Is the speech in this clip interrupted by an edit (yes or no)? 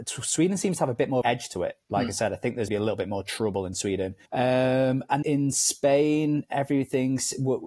yes